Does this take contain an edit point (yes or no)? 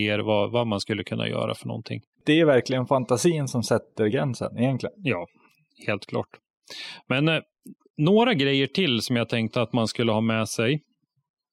no